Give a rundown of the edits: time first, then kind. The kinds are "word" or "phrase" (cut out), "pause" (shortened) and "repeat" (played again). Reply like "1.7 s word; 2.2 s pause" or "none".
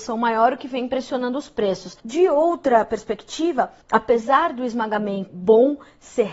2.0 s pause; 3.8 s pause; 5.3 s word